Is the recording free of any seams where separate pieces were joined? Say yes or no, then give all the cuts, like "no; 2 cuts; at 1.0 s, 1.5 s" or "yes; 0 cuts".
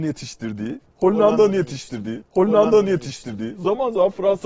no; 1 cut; at 2.2 s